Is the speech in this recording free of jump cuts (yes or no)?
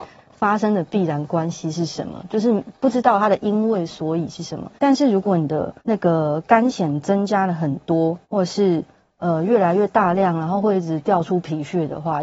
no